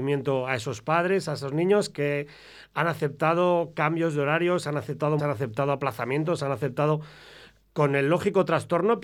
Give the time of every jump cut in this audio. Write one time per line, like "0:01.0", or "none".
0:05.2